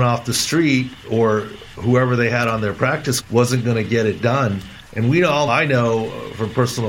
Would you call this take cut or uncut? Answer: cut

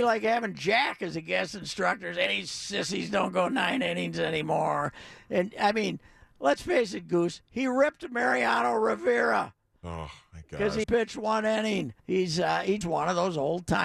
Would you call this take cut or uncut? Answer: cut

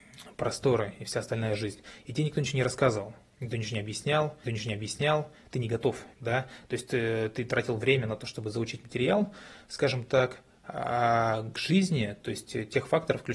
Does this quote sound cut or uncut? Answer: cut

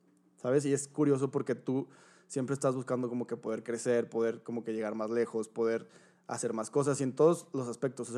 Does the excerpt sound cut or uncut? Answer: uncut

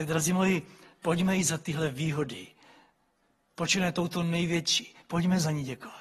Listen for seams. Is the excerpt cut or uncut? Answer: uncut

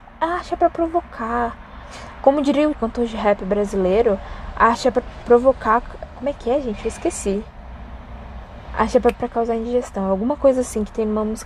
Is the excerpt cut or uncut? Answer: cut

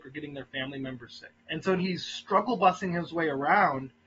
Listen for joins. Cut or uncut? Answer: cut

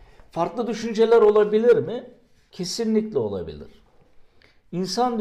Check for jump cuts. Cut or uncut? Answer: uncut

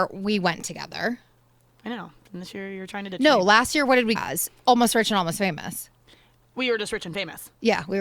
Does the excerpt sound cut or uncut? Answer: cut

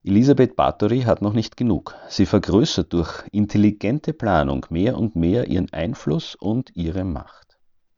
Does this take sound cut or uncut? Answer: uncut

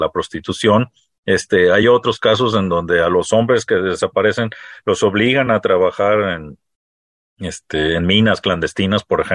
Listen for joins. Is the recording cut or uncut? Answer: uncut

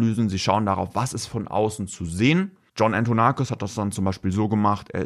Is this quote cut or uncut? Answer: uncut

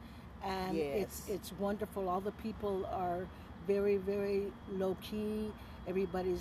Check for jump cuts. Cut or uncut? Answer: cut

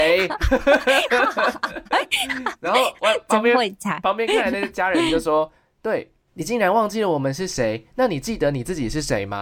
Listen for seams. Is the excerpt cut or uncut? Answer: cut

